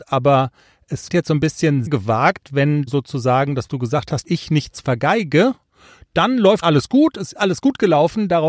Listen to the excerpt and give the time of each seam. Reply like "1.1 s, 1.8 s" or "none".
1.1 s, 1.9 s, 2.9 s, 3.7 s, 4.2 s, 6.6 s, 7.3 s